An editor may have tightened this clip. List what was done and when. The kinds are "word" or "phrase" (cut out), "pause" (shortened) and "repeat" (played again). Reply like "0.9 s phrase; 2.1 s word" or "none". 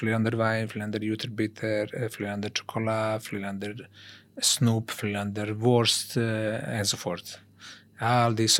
none